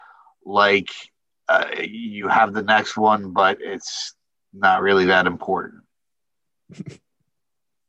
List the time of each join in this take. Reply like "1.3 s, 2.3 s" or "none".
none